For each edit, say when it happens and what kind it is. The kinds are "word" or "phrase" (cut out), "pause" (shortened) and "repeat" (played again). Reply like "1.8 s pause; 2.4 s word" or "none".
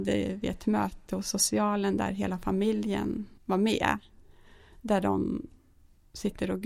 3.4 s pause